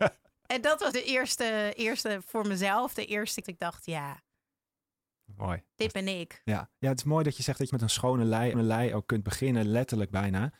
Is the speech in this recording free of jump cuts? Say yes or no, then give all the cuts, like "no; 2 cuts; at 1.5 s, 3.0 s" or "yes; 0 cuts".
no; 5 cuts; at 0.9 s, 3.4 s, 5.7 s, 7.7 s, 8.5 s